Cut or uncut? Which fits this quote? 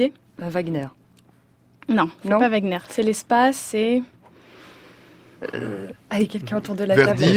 uncut